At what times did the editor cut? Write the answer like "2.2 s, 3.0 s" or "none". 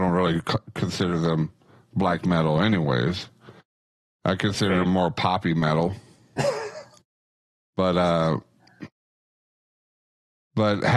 none